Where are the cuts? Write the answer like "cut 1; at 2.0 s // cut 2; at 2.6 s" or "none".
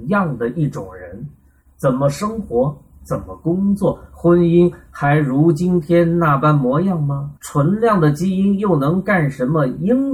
cut 1; at 7.4 s